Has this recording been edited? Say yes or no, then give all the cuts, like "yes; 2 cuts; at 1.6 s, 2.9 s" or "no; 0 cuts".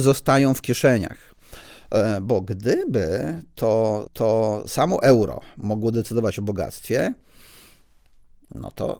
yes; 1 cut; at 4.1 s